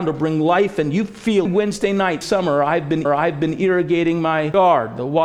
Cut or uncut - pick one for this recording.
cut